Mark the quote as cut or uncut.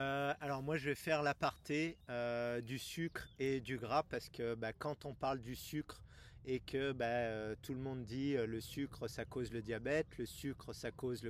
cut